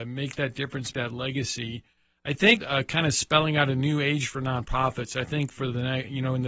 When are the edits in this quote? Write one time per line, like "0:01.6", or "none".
0:00.9
0:02.6